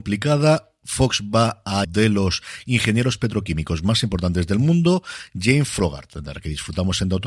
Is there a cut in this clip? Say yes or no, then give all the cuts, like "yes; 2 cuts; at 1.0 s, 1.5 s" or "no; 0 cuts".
yes; 1 cut; at 1.8 s